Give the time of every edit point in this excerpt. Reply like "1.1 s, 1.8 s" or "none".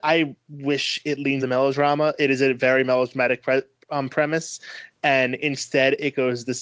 1.4 s